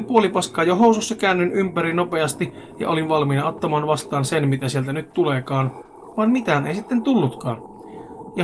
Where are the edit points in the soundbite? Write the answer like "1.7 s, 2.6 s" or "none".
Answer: none